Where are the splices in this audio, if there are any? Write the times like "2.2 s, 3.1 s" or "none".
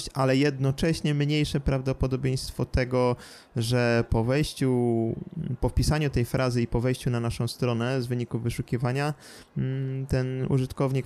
none